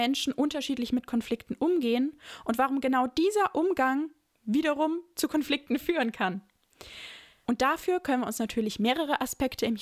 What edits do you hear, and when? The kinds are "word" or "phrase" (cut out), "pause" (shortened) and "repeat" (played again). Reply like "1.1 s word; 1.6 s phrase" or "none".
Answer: none